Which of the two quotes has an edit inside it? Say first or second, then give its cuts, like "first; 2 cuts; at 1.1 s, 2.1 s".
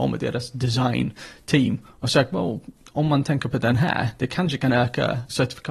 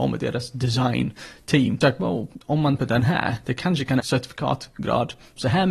second; 4 cuts; at 1.8 s, 2.4 s, 2.8 s, 4.0 s